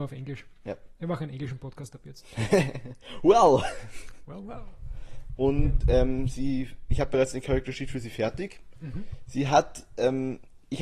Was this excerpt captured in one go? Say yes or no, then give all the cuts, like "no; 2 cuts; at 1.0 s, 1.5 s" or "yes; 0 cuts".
yes; 0 cuts